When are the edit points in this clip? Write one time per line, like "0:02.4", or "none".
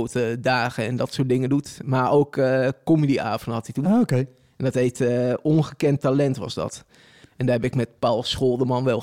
none

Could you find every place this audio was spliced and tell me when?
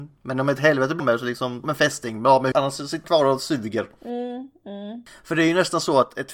0:01.0
0:01.6
0:02.5
0:03.0

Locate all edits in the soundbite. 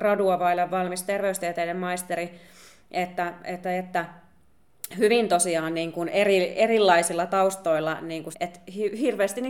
0:08.3

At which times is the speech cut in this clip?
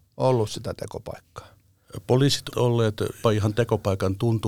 0:02.5
0:03.2

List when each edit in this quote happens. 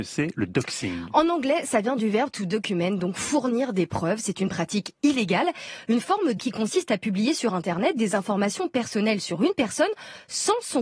0:06.4

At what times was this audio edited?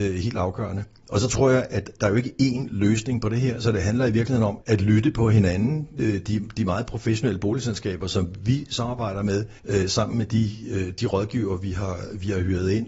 0:04.6
0:09.6

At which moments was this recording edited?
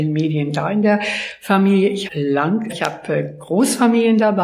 0:02.1
0:02.7

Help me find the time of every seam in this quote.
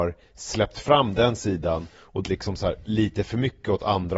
0:02.2

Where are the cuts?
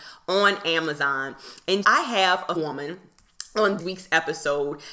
0:01.8
0:02.6
0:03.8

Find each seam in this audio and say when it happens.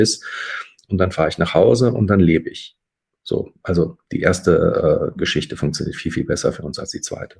none

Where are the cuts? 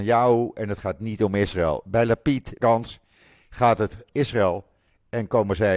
0:02.6
0:04.1

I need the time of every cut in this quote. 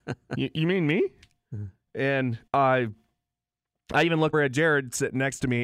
0:02.5
0:04.3

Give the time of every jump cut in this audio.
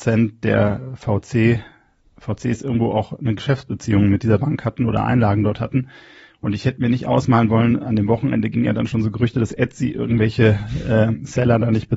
none

